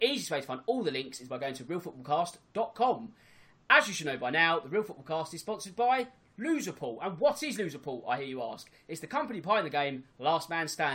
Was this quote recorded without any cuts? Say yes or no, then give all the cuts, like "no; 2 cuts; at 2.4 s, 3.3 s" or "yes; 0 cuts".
yes; 0 cuts